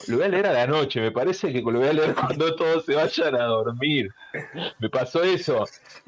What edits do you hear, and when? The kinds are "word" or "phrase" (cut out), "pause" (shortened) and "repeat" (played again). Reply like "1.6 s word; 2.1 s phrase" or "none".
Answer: none